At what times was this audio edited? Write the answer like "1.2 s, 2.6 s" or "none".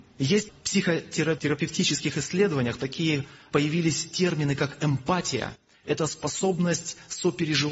none